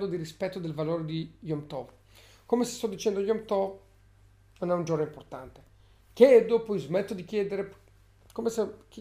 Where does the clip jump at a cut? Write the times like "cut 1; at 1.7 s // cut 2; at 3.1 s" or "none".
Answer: none